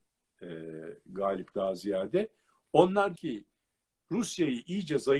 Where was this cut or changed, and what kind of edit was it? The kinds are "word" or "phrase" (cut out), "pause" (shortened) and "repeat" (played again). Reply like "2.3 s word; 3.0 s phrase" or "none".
1.5 s word; 3.2 s word

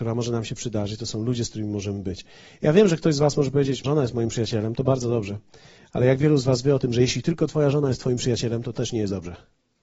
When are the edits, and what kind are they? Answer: 3.8 s word

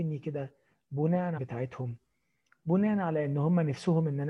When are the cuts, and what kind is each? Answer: 1.4 s phrase

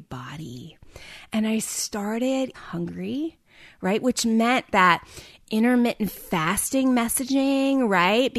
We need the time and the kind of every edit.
2.5 s phrase; 4.7 s phrase

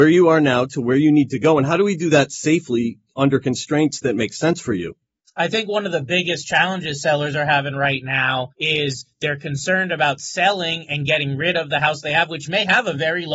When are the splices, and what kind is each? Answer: 5.2 s pause; 8.5 s pause

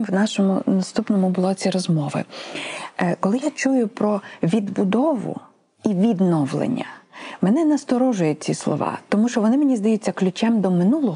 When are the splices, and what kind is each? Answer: none

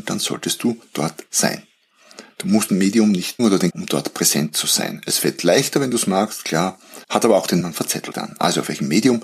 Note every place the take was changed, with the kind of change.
2.7 s word; 3.4 s word; 3.7 s phrase; 7.0 s pause; 7.6 s word; 8.1 s word

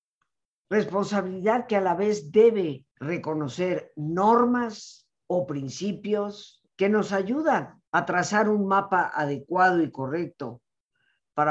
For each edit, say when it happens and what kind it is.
2.9 s pause; 5.2 s pause; 6.7 s pause; 7.9 s pause

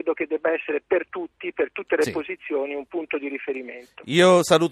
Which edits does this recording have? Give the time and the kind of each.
none

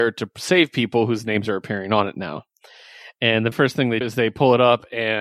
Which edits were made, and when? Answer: 3.5 s word; 4.0 s word

